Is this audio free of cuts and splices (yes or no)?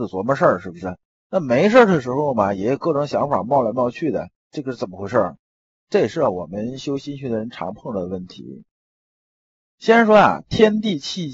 yes